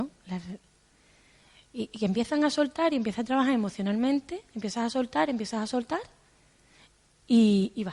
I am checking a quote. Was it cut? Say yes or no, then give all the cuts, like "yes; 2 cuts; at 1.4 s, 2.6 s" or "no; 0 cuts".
no; 0 cuts